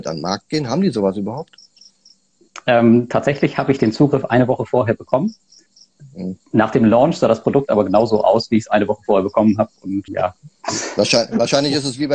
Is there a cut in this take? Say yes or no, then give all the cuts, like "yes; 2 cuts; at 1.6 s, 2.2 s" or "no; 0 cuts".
yes; 1 cut; at 10.1 s